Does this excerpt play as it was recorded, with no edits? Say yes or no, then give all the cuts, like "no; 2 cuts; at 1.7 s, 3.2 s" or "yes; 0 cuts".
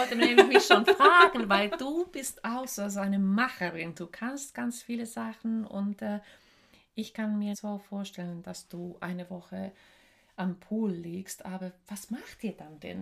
no; 1 cut; at 7.5 s